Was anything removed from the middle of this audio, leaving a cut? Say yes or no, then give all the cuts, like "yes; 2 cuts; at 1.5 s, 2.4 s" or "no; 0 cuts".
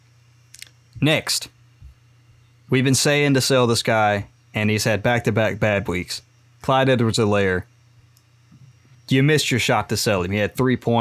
yes; 1 cut; at 8.9 s